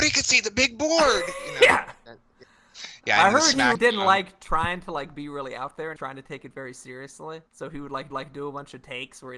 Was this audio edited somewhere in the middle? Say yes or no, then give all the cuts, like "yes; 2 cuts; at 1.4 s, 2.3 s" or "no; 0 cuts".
yes; 4 cuts; at 3.7 s, 6.0 s, 7.5 s, 8.1 s